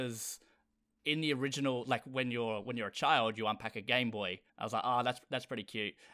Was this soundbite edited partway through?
yes; 1 cut; at 4.5 s

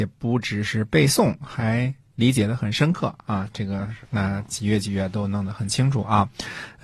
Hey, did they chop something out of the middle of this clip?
yes; 1 cut; at 4.0 s

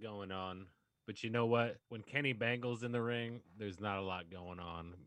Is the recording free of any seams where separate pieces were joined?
no; 1 cut; at 1.8 s

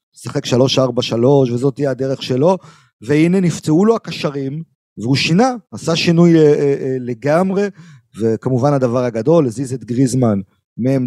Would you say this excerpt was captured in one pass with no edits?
yes; 0 cuts

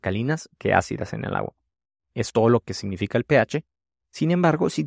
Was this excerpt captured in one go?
no; 1 cut; at 2.3 s

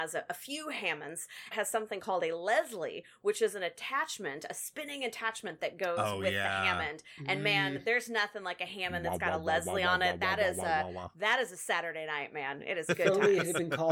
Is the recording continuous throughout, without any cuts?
no; 1 cut; at 1.5 s

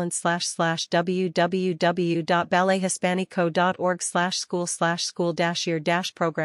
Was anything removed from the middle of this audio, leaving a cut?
no; 0 cuts

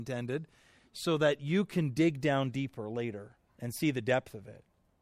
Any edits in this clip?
yes; 1 cut; at 3.5 s

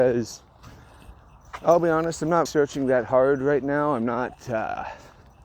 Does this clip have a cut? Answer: yes; 1 cut; at 2.5 s

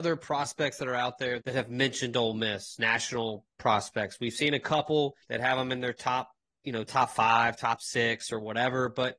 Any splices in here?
yes; 2 cuts; at 1.4 s, 5.2 s

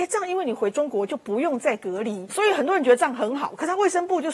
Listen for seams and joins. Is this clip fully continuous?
no; 1 cut; at 2.3 s

